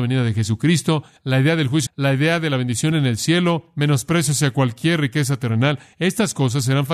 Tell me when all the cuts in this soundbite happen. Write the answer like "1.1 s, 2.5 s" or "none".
1.9 s, 2.9 s